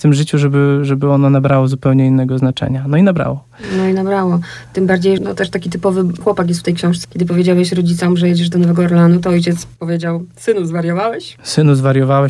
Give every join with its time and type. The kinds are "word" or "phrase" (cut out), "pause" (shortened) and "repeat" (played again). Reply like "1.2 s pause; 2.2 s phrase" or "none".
5.2 s word; 6.2 s word; 7.0 s word

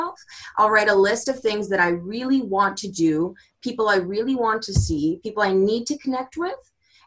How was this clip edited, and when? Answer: none

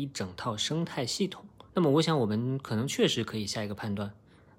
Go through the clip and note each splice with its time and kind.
1.7 s pause

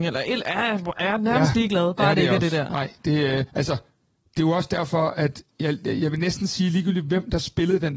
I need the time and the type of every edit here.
3.5 s pause; 5.5 s pause

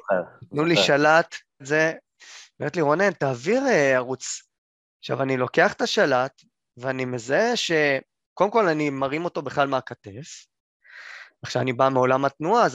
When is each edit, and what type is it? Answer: 1.6 s phrase

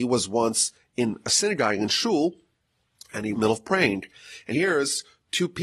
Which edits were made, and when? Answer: 3.3 s word; 4.5 s word

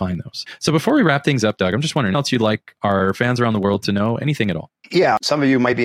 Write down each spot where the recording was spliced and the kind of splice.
2.1 s phrase

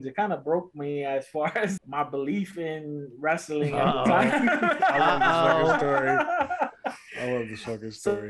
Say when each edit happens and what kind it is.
1.8 s word

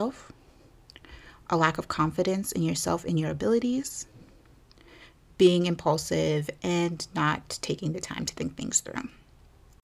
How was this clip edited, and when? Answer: none

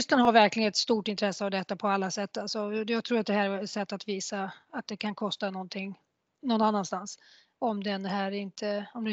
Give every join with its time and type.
none

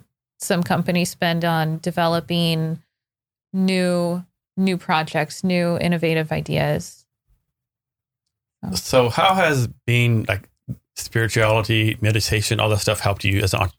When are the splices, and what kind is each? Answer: none

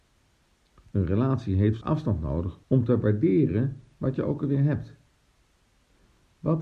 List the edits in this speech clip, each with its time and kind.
1.8 s word; 2.6 s pause

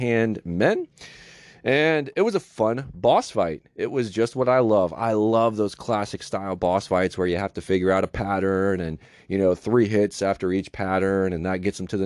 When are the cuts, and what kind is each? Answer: none

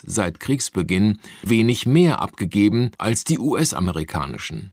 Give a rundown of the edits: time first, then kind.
1.5 s word; 2.9 s pause

